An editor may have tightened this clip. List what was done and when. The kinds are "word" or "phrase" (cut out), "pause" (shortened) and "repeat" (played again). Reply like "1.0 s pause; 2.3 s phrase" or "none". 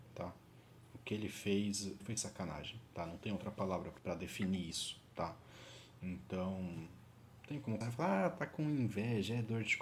2.0 s word; 4.0 s word; 7.8 s word